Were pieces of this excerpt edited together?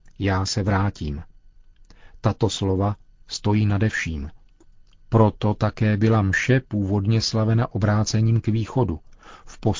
no; 0 cuts

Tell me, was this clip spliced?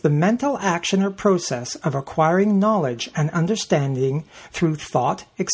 no; 0 cuts

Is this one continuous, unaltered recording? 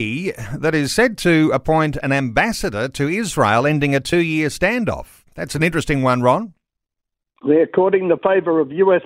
yes; 0 cuts

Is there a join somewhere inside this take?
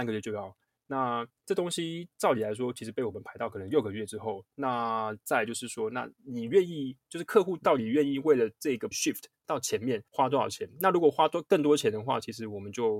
yes; 3 cuts; at 1.4 s, 8.9 s, 10.1 s

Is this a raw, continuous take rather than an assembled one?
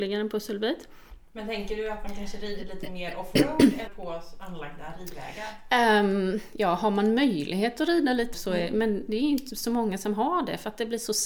no; 2 cuts; at 3.9 s, 8.3 s

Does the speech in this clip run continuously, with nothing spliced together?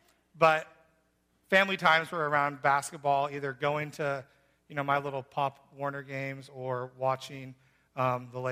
yes; 0 cuts

